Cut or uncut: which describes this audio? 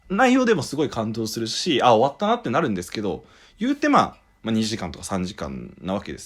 uncut